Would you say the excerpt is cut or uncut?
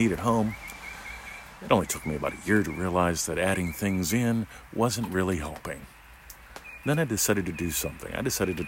uncut